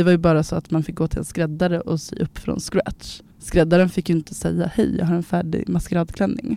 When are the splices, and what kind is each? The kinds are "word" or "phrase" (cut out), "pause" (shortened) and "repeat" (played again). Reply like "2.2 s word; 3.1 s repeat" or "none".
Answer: 3.3 s pause